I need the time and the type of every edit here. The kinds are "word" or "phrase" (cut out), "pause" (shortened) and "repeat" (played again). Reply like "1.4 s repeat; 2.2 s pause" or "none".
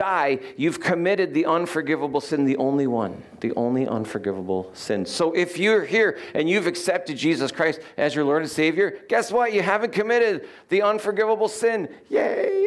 none